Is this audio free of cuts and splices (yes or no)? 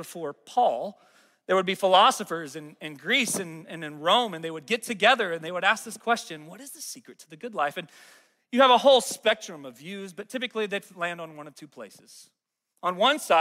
yes